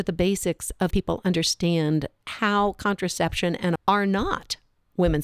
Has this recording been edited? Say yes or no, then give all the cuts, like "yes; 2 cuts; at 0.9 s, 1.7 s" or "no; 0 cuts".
yes; 3 cuts; at 0.9 s, 2.2 s, 3.8 s